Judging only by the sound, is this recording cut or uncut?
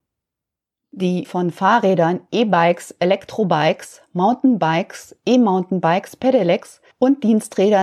cut